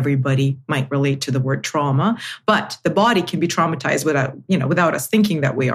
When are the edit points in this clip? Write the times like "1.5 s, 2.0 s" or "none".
none